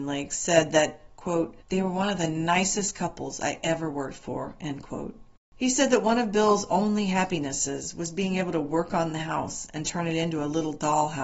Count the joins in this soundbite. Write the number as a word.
one